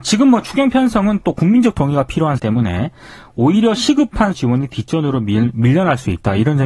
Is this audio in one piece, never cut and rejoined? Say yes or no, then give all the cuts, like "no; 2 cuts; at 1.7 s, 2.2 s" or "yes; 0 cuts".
no; 2 cuts; at 2.4 s, 4.3 s